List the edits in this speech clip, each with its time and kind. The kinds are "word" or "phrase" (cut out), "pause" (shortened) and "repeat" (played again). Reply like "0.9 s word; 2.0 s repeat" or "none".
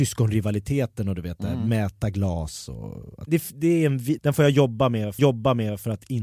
3.3 s word; 4.2 s word; 5.2 s repeat